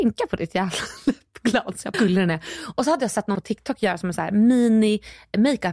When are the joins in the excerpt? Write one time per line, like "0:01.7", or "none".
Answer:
0:01.9
0:03.3

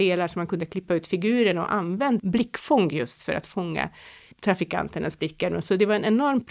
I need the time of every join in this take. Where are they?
0:02.2
0:04.3

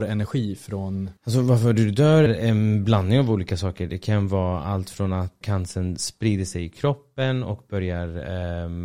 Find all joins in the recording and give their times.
0:01.2
0:02.3
0:05.4

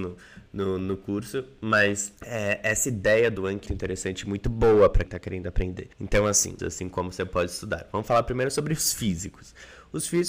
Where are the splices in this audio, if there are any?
0:02.2
0:03.7
0:05.0
0:05.9
0:06.6

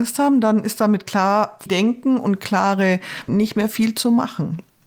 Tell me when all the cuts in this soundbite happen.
0:01.7
0:03.3

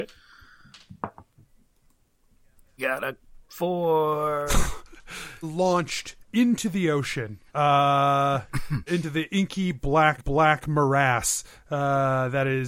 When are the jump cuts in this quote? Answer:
0:02.8
0:03.4
0:05.4
0:06.2
0:07.5
0:08.9
0:10.2

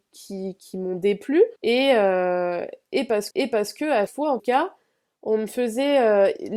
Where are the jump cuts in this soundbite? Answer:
0:01.6
0:03.3
0:04.1
0:04.4

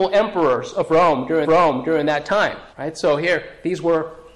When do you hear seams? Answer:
0:01.4
0:02.7

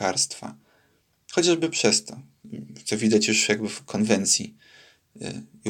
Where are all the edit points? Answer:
none

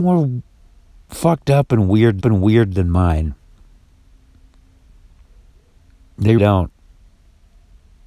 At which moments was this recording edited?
0:02.2
0:06.4

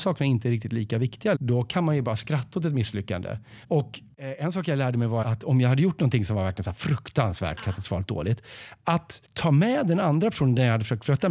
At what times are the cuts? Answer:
0:01.3
0:03.6
0:05.2
0:09.2

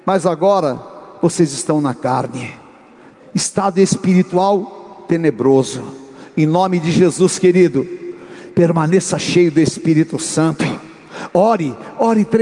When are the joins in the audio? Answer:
none

